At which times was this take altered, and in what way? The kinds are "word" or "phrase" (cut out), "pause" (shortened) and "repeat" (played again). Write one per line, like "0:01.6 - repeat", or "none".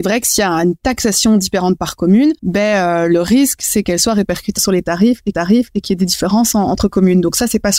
0:02.4 - pause
0:04.6 - word
0:05.3 - repeat